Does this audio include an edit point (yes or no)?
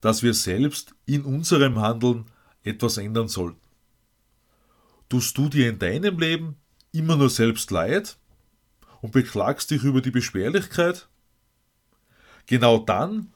no